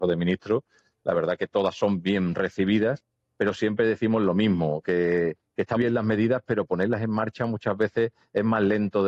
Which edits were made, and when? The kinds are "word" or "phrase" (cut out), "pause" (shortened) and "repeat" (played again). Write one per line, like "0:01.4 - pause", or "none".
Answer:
0:05.8 - word